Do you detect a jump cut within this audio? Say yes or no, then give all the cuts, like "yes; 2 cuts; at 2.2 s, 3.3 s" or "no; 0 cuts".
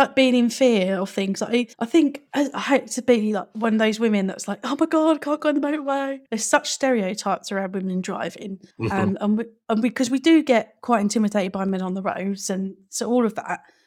yes; 4 cuts; at 1.7 s, 2.3 s, 6.3 s, 8.7 s